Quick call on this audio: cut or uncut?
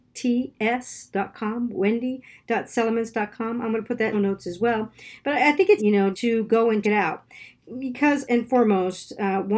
cut